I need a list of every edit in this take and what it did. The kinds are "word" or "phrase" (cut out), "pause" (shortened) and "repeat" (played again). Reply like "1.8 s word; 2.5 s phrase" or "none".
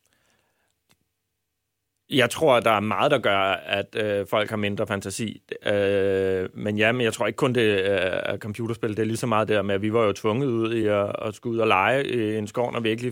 none